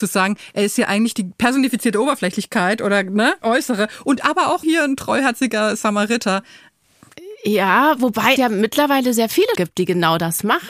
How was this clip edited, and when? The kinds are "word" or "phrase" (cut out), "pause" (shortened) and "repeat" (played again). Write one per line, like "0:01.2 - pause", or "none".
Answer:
0:03.4 - word
0:04.6 - word
0:08.4 - word
0:09.6 - word